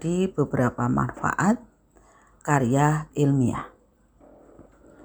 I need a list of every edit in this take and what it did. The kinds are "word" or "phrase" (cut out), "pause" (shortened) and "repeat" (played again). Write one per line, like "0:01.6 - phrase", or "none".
0:02.4 - word
0:03.1 - word